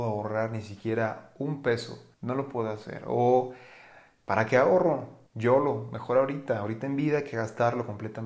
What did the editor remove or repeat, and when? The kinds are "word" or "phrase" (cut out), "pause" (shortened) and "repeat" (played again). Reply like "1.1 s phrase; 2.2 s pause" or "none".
2.1 s pause; 5.3 s pause